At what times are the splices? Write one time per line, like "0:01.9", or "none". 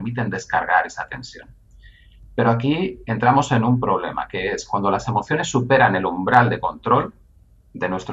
none